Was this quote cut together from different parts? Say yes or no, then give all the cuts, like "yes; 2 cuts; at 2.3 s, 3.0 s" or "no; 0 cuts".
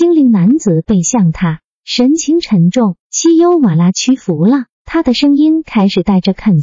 yes; 2 cuts; at 3.0 s, 4.7 s